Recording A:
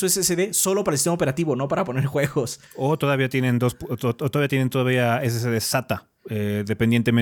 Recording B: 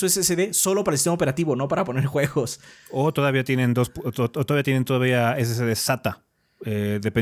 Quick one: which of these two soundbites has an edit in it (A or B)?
A